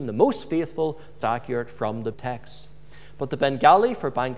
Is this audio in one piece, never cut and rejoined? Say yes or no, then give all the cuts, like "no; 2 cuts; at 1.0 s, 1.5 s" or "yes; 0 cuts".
no; 2 cuts; at 1.2 s, 2.1 s